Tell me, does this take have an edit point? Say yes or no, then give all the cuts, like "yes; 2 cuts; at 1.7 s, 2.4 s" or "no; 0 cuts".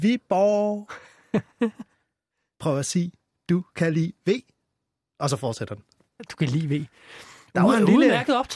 no; 0 cuts